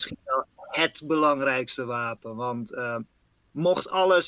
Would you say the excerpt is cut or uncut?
uncut